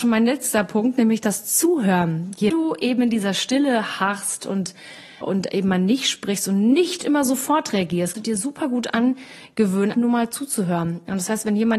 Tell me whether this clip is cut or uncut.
cut